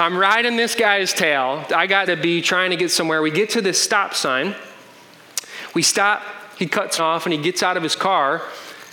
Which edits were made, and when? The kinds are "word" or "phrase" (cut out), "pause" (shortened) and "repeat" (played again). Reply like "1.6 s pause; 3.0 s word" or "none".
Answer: 2.1 s word; 7.0 s word